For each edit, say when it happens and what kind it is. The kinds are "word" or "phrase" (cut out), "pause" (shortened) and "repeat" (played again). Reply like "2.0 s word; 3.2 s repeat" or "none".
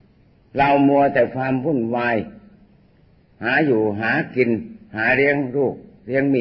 none